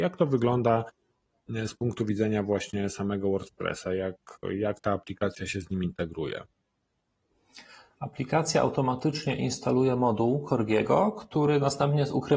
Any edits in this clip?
no; 0 cuts

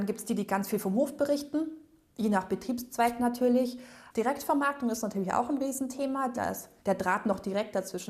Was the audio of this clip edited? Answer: yes; 1 cut; at 6.8 s

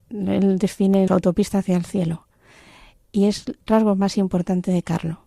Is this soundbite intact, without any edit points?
no; 2 cuts; at 1.1 s, 3.7 s

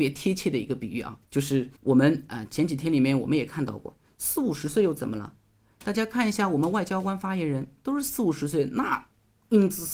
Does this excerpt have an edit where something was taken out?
yes; 2 cuts; at 1.2 s, 1.8 s

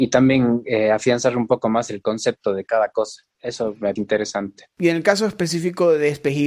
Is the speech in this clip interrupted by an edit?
yes; 2 cuts; at 3.3 s, 4.0 s

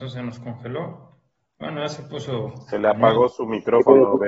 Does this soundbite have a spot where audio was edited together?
no; 0 cuts

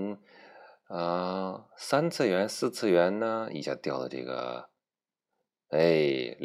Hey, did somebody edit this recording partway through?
no; 0 cuts

